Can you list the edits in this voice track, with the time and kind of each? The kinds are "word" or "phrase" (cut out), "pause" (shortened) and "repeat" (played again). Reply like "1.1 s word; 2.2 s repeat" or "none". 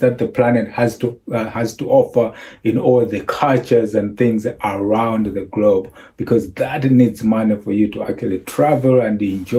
none